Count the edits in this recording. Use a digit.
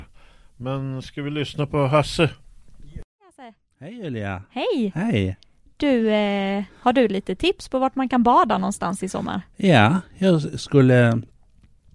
0